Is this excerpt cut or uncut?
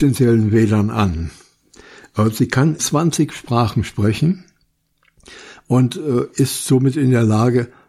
cut